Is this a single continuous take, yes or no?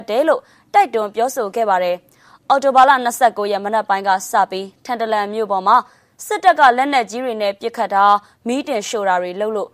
yes